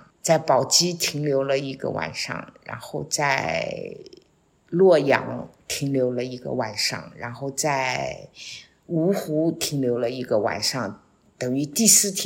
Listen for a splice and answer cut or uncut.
uncut